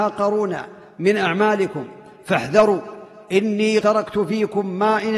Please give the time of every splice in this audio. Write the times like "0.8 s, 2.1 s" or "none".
3.8 s